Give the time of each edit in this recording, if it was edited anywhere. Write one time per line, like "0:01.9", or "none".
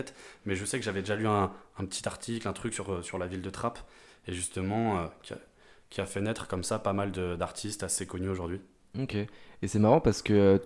none